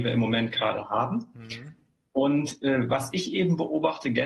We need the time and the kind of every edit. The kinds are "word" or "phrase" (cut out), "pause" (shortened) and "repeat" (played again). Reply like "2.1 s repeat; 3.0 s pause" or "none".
none